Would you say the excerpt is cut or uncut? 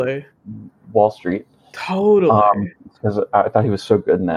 uncut